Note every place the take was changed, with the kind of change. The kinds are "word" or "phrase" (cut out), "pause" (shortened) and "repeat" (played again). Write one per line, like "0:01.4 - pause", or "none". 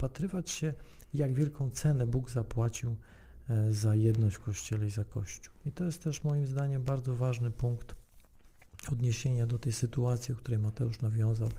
0:05.6 - pause